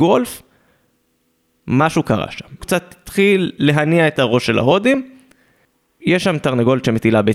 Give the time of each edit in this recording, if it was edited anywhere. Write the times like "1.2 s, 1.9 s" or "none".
2.6 s